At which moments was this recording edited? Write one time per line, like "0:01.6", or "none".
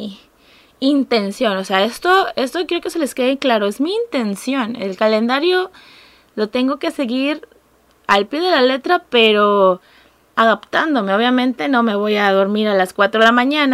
none